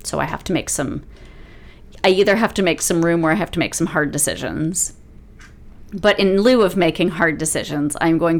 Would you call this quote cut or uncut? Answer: uncut